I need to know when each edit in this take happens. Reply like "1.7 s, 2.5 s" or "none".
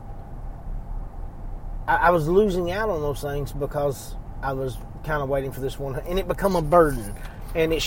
none